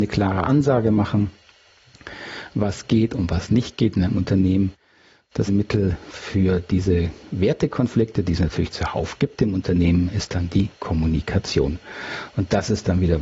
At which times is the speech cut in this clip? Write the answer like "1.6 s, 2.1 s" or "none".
5.5 s